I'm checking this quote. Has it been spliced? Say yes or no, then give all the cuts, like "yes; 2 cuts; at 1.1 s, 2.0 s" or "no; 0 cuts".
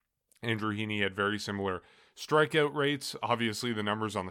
no; 0 cuts